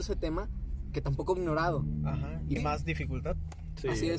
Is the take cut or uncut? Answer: cut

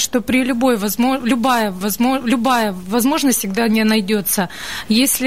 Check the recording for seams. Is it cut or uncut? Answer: cut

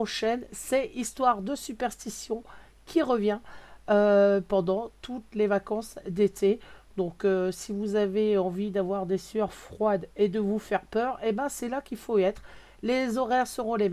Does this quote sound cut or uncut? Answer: uncut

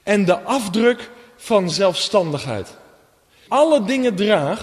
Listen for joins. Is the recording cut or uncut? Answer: cut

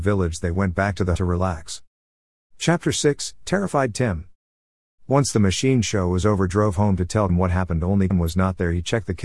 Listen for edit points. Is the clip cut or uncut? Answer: cut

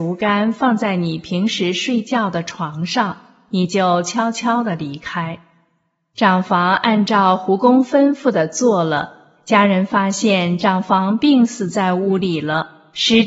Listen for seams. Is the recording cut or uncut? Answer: uncut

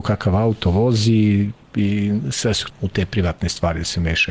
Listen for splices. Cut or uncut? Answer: cut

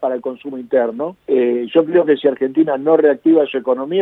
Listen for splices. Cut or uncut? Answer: cut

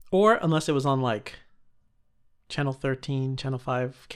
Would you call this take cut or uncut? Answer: uncut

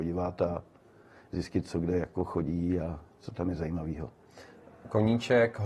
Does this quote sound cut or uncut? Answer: uncut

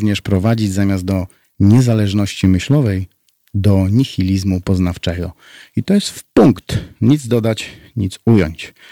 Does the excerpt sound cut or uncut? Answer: uncut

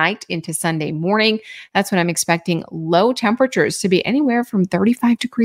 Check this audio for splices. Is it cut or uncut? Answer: uncut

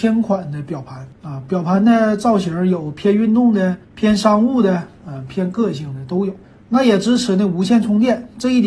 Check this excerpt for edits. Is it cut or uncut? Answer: cut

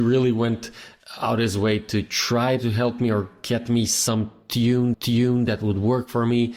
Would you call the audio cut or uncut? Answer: cut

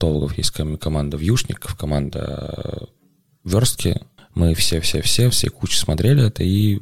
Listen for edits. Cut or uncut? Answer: cut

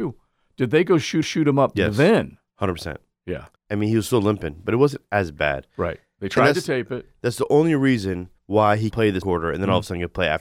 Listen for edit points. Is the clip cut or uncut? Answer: cut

